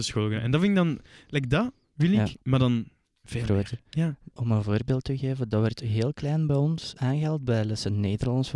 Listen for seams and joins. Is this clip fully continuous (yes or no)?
yes